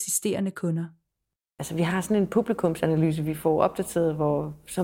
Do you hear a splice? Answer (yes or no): no